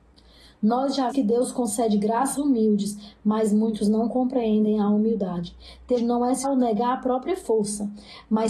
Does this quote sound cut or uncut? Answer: cut